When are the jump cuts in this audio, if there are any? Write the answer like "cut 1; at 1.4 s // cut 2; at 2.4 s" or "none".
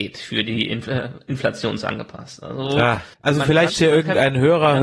cut 1; at 3.1 s // cut 2; at 3.7 s